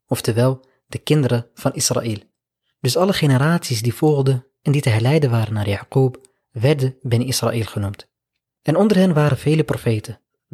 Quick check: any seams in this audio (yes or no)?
no